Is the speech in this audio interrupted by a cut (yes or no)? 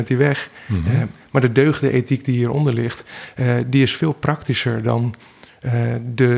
no